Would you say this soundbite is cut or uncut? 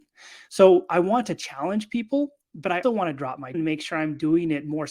cut